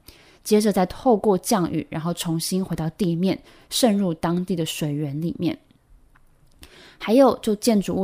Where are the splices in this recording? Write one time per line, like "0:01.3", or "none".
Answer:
none